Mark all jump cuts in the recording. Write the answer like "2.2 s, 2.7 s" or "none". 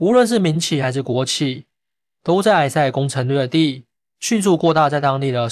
none

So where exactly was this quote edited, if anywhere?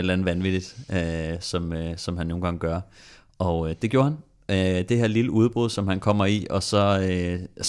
none

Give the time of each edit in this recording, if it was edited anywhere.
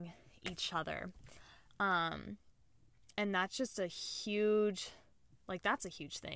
none

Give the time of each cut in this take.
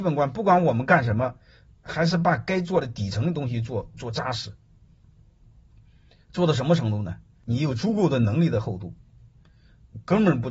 none

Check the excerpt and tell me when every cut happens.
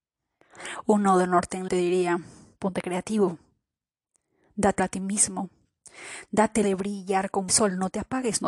1.7 s, 4.8 s, 6.6 s, 7.5 s

